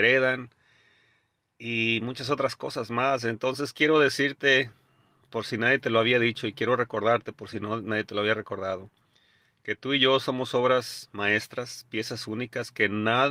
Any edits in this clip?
no; 0 cuts

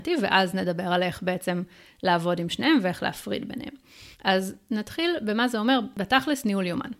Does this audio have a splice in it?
yes; 1 cut; at 4.1 s

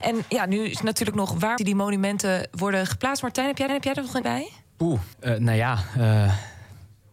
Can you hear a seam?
yes; 5 cuts; at 1.1 s, 1.6 s, 3.7 s, 4.2 s, 5.1 s

